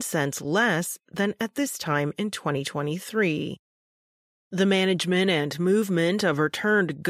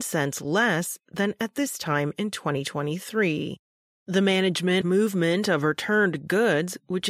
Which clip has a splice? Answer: second; 2 cuts; at 3.7 s, 4.8 s

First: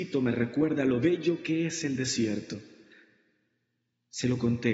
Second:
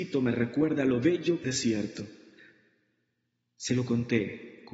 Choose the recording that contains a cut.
second; 1 cut; at 1.4 s

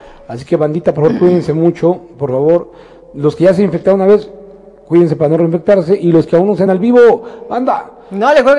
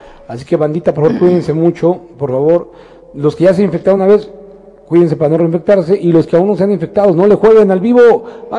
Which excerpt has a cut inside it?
first; 1 cut; at 6.7 s

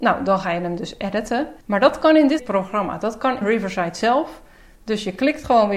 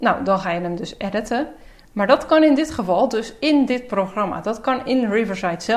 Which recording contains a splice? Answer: first; 3 cuts; at 1.6 s, 2.4 s, 3.4 s

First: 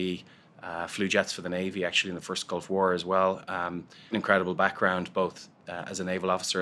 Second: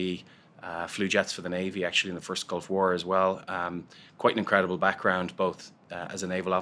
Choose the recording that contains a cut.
first; 1 cut; at 4.1 s

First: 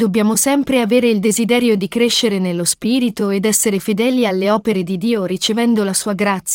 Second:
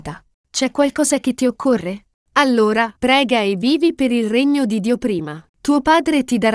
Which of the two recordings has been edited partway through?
second; 2 cuts; at 3.0 s, 5.5 s

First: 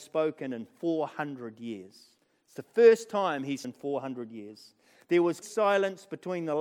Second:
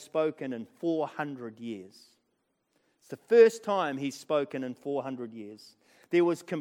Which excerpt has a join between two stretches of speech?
first; 3 cuts; at 2.2 s, 3.6 s, 5.4 s

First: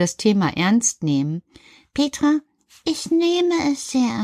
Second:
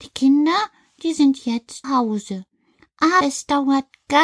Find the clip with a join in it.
second; 2 cuts; at 1.8 s, 3.2 s

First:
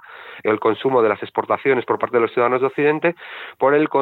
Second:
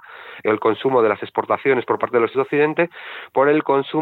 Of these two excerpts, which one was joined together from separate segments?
second; 1 cut; at 2.3 s

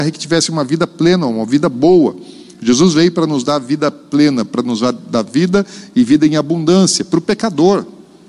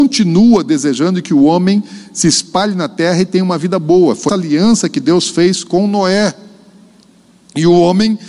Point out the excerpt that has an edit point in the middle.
second; 1 cut; at 4.3 s

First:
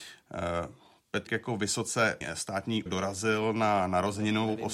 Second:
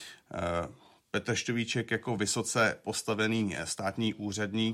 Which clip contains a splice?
first; 3 cuts; at 1.3 s, 2.2 s, 2.9 s

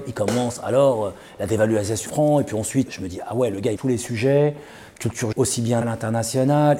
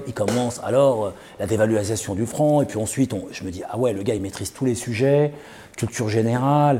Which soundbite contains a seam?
first; 5 cuts; at 2.1 s, 2.9 s, 3.8 s, 5.3 s, 5.8 s

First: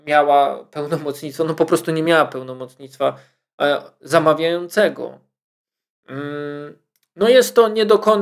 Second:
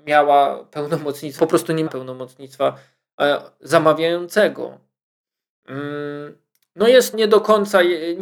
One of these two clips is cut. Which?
second; 3 cuts; at 1.4 s, 1.9 s, 7.1 s

